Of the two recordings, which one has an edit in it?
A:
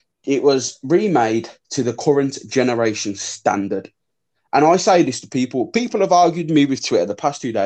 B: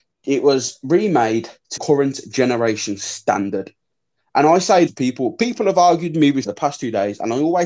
B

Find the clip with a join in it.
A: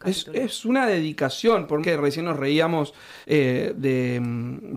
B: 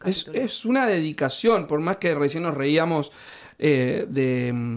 A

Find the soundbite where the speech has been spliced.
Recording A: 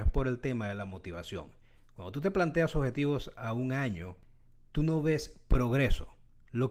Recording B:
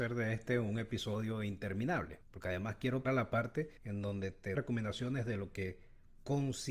B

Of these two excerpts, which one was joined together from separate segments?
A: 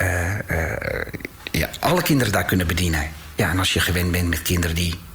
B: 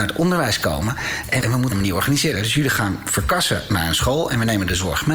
B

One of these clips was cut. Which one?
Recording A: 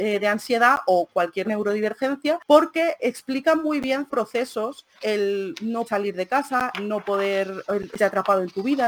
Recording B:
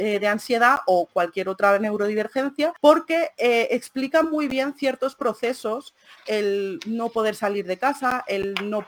A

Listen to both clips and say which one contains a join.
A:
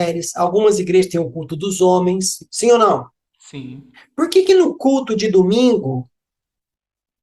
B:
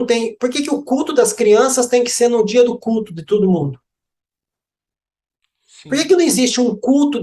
A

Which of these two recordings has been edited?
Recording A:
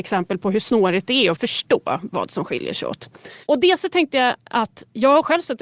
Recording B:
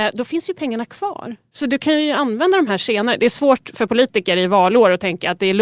A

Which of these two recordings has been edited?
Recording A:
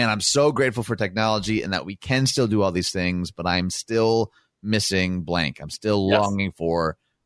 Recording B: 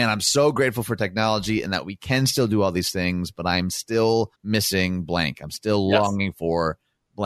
B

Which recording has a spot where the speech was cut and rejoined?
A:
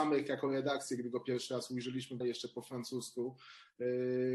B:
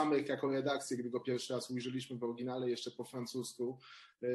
A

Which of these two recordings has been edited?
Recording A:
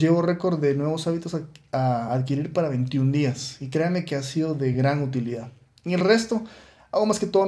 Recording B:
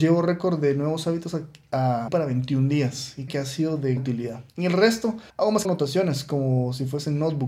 B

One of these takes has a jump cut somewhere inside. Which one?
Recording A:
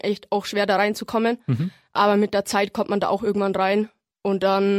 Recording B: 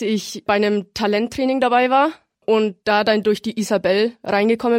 B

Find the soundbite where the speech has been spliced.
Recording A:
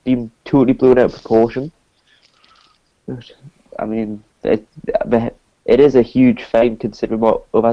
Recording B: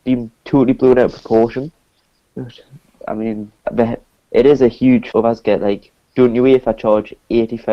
B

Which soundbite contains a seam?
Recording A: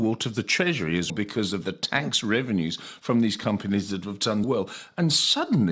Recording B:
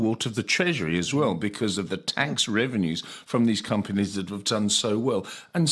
A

